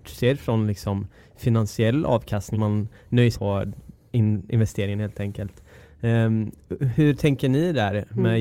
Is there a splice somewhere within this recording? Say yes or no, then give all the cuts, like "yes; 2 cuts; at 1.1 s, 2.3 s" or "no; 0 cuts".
yes; 2 cuts; at 2.5 s, 3.3 s